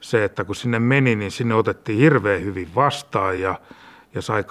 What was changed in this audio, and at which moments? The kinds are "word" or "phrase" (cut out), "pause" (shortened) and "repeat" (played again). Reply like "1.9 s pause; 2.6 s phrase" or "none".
none